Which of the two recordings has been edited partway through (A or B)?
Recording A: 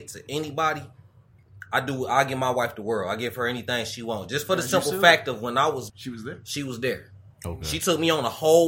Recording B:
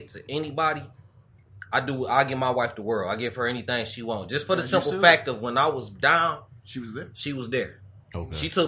A